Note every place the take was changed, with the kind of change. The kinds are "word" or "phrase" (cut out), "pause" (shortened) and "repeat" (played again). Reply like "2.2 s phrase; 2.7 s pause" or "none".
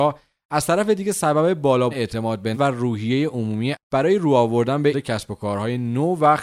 1.9 s word; 2.5 s word; 3.7 s word; 4.9 s word

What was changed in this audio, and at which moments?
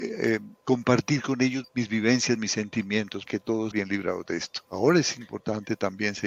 1.6 s word; 3.3 s word; 3.7 s word; 4.6 s pause

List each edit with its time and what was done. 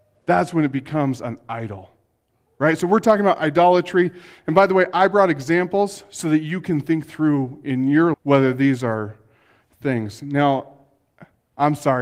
8.1 s word

